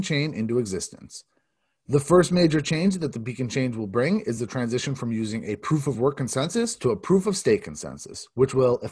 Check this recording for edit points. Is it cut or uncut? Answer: uncut